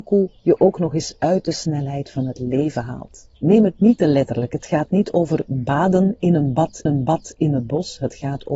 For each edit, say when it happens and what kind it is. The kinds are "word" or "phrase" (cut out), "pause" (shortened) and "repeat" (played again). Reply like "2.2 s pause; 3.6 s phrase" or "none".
3.4 s pause; 6.9 s repeat